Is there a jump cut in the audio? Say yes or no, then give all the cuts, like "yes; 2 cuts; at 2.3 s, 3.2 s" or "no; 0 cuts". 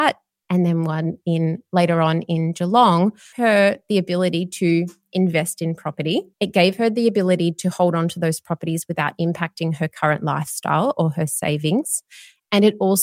yes; 2 cuts; at 3.3 s, 6.3 s